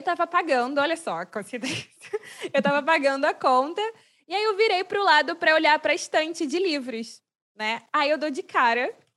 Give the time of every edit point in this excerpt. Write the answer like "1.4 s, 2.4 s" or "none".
none